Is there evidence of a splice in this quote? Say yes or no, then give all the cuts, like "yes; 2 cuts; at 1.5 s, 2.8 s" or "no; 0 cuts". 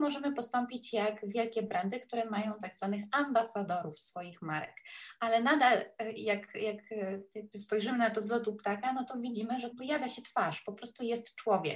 yes; 1 cut; at 9.7 s